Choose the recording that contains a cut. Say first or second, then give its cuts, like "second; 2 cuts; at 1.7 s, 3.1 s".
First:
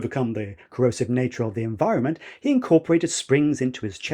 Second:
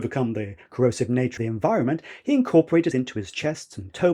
second; 2 cuts; at 1.4 s, 2.9 s